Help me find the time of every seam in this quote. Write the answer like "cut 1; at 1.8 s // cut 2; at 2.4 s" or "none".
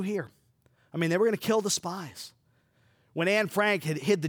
none

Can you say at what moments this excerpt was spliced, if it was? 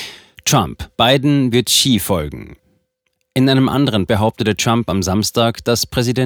cut 1; at 0.9 s // cut 2; at 4.1 s

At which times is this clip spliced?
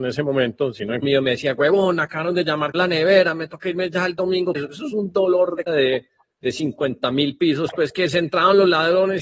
cut 1; at 1.0 s // cut 2; at 2.7 s // cut 3; at 4.5 s // cut 4; at 5.7 s // cut 5; at 6.3 s

